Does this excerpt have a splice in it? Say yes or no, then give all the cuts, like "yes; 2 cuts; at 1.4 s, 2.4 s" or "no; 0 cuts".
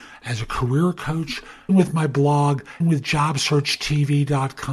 yes; 2 cuts; at 1.7 s, 2.8 s